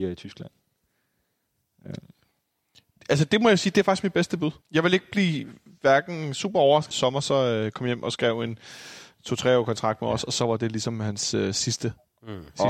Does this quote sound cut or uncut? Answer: cut